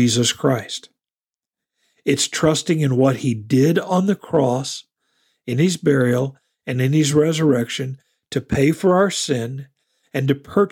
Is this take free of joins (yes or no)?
yes